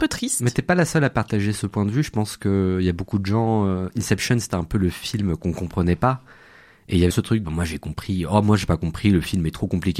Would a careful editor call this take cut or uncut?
cut